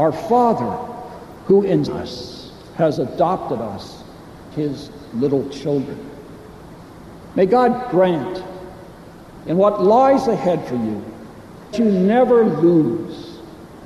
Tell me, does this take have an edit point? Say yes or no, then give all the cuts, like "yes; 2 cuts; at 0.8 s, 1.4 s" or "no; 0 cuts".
yes; 3 cuts; at 1.9 s, 4.5 s, 11.7 s